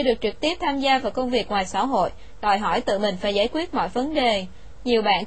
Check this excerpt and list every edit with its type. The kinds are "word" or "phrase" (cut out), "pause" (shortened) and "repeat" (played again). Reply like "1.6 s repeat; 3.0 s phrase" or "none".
none